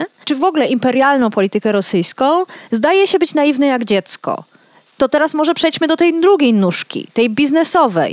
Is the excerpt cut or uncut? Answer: uncut